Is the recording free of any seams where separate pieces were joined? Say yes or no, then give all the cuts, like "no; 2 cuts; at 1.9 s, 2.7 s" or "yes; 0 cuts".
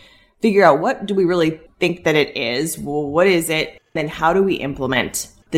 yes; 0 cuts